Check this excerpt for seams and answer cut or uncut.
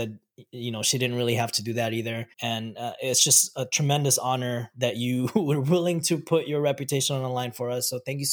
cut